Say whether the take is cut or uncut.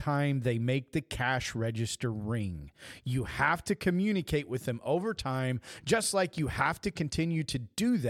uncut